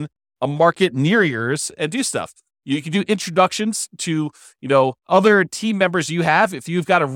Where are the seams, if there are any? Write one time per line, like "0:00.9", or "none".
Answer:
0:05.0